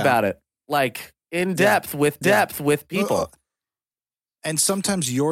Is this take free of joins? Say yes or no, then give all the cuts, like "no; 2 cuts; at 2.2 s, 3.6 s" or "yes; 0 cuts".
no; 1 cut; at 2.2 s